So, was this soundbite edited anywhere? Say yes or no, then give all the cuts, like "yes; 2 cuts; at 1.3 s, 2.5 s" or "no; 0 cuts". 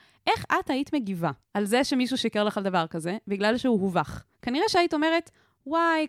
yes; 2 cuts; at 1.4 s, 4.3 s